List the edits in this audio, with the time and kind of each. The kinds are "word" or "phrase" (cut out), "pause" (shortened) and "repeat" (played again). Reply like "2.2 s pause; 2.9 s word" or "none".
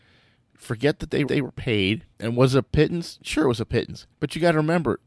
1.3 s repeat; 2.1 s pause; 4.1 s pause

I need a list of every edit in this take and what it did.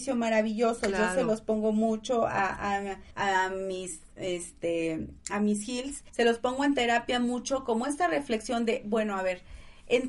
3.1 s pause; 5.2 s pause; 6.1 s pause

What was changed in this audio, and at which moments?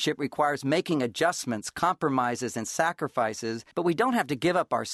3.7 s pause

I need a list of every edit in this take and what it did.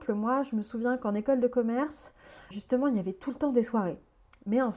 2.5 s word

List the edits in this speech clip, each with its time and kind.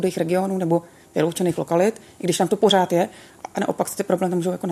none

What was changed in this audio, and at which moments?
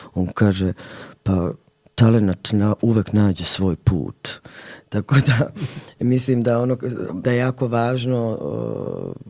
7.2 s word

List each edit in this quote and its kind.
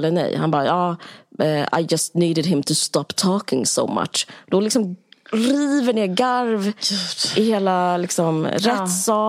none

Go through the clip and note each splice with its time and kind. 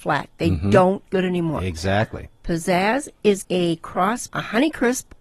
1.1 s word; 3.4 s word; 4.3 s word

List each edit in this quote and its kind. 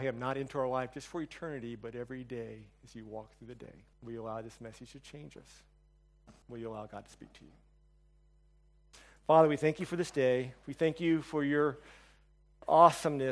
3.9 s pause; 6.4 s pause

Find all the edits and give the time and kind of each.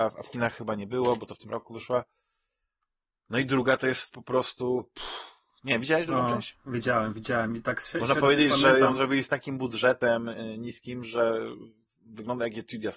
none

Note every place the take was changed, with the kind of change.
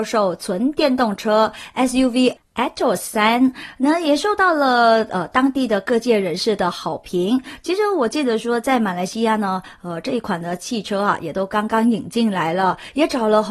none

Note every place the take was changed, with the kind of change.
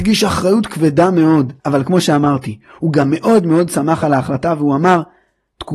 1.6 s pause

